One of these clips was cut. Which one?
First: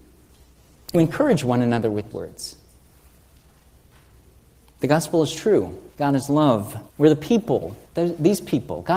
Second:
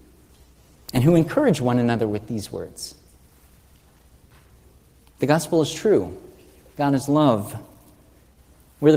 first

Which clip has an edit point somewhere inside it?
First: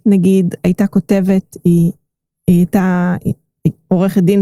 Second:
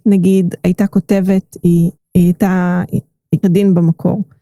second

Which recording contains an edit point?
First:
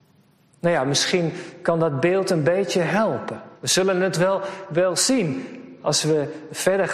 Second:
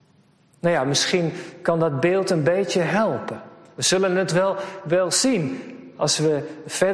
first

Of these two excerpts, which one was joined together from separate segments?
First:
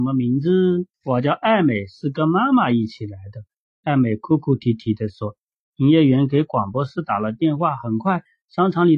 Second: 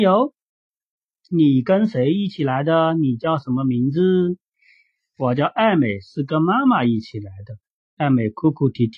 first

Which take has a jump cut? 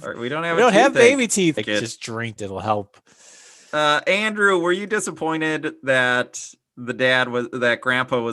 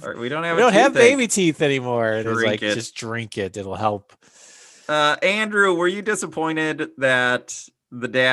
first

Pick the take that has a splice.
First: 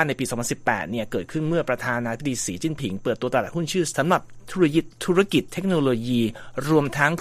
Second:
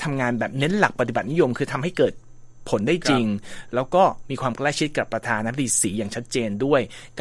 first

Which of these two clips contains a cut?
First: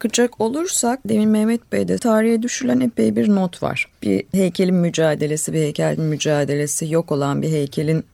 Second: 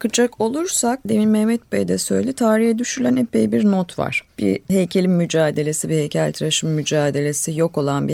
first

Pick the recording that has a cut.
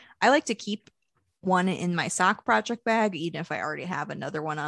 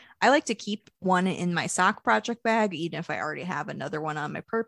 second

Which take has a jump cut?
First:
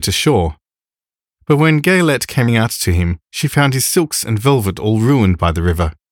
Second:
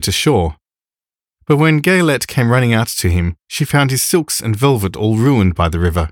first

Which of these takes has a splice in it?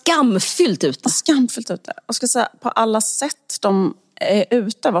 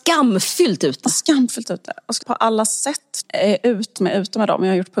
second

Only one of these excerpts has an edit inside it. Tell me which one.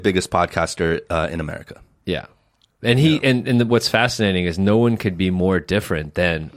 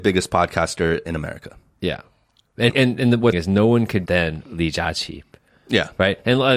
second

